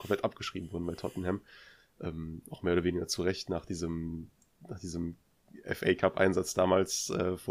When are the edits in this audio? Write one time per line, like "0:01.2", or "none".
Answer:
none